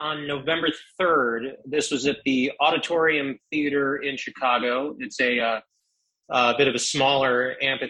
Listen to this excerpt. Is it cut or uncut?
uncut